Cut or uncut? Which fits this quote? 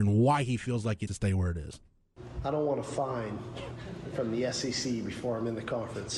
cut